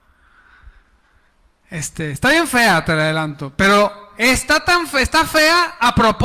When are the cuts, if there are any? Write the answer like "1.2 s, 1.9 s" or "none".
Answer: none